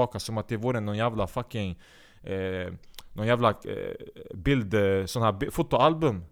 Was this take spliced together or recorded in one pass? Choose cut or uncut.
uncut